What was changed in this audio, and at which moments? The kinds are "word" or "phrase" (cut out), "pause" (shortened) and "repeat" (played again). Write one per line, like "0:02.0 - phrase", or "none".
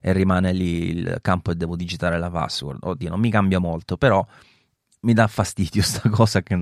none